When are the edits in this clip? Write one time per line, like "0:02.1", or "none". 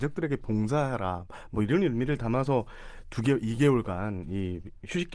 none